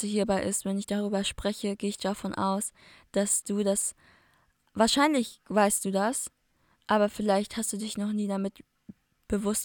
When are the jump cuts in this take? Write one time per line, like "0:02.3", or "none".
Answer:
none